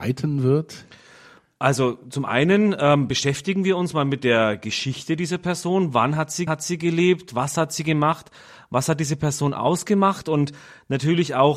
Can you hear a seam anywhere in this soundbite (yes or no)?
yes